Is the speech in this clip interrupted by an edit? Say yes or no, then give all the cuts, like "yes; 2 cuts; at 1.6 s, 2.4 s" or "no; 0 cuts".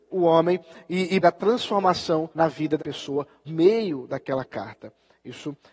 yes; 4 cuts; at 1.2 s, 2.3 s, 2.8 s, 3.5 s